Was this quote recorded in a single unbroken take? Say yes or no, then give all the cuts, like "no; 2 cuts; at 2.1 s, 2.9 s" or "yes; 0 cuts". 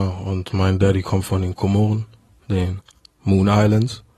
yes; 0 cuts